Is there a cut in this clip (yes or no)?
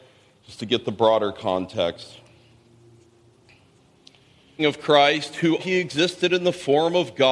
yes